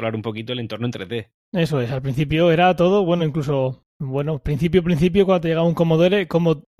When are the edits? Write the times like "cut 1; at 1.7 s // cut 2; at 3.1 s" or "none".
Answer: none